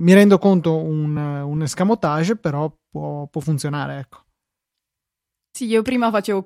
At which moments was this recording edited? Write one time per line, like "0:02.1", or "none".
none